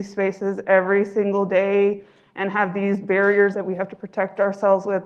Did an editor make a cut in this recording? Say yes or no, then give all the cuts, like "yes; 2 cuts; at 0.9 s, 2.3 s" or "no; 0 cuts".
yes; 1 cut; at 3.5 s